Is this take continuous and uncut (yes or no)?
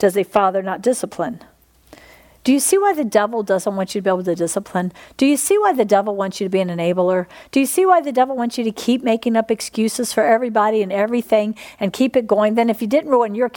yes